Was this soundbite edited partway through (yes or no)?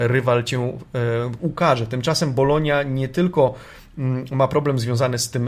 yes